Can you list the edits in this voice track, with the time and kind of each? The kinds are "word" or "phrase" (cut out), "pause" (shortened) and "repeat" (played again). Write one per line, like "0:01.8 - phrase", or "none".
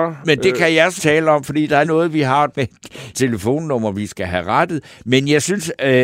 0:01.0 - word
0:01.8 - word
0:02.5 - word
0:03.1 - word